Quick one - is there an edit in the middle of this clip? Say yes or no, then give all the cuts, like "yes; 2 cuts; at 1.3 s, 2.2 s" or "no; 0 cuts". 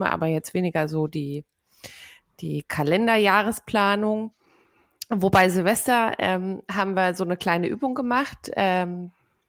no; 0 cuts